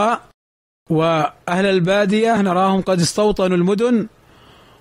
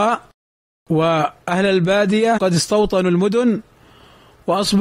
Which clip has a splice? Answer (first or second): second